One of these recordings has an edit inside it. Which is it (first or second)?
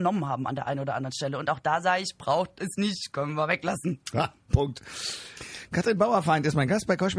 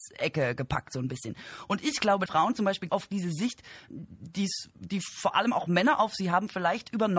second